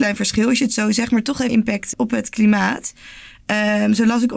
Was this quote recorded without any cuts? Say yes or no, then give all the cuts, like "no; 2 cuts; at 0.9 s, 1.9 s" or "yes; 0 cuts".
no; 2 cuts; at 1.5 s, 1.9 s